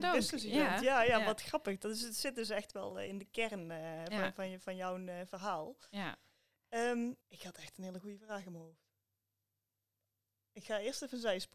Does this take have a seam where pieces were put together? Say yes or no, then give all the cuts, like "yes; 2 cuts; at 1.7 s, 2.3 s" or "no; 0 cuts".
yes; 1 cut; at 7.2 s